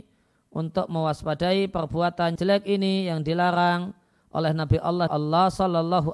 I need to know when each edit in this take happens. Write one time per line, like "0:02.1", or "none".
0:02.4
0:05.1